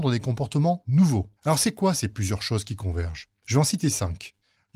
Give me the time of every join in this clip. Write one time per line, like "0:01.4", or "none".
0:01.4

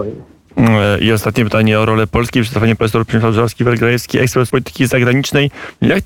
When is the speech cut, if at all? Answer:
0:04.5

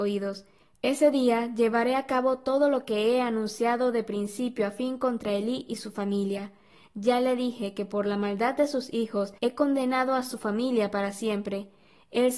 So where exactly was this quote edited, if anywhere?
0:09.4

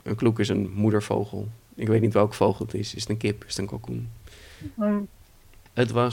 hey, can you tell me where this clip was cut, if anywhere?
none

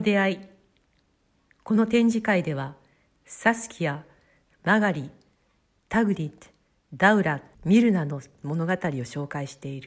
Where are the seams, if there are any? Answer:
0:03.2
0:07.5

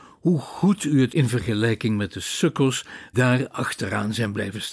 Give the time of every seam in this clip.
0:01.1
0:03.1

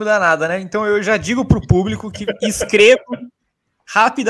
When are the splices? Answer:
none

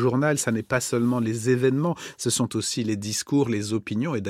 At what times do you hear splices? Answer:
none

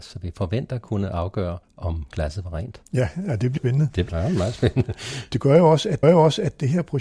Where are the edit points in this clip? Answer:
0:01.6
0:02.9
0:03.6
0:04.1
0:06.0

